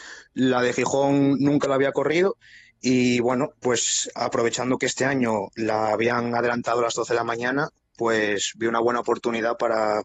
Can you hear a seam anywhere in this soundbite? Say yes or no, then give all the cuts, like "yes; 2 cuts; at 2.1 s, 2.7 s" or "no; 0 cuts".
no; 0 cuts